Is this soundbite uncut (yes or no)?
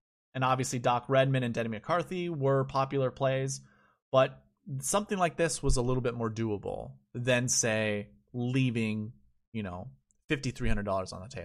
yes